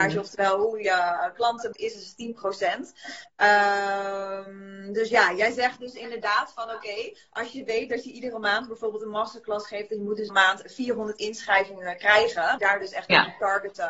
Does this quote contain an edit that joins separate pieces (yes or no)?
yes